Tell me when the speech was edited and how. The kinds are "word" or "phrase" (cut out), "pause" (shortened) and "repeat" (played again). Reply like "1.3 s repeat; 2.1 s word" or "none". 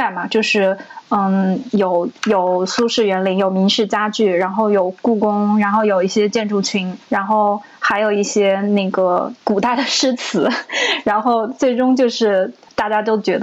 2.2 s pause; 7.0 s pause; 9.4 s pause